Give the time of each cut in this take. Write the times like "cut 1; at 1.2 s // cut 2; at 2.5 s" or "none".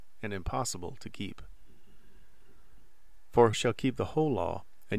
cut 1; at 3.5 s